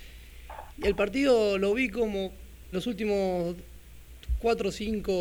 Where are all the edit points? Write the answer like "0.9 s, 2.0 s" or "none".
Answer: 2.7 s